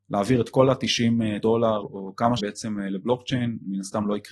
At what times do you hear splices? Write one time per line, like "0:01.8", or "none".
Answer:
0:01.4
0:01.8
0:02.4